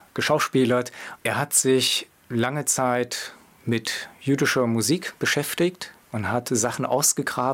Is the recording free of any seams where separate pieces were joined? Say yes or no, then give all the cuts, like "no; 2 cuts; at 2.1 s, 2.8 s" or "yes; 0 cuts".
yes; 0 cuts